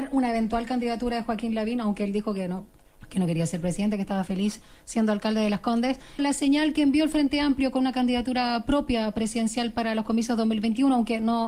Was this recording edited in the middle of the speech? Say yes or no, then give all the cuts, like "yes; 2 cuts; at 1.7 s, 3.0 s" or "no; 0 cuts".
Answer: yes; 1 cut; at 6.2 s